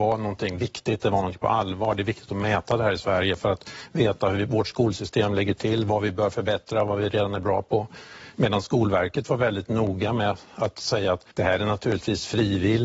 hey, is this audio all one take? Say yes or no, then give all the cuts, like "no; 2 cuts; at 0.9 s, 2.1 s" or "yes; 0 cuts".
no; 1 cut; at 11.3 s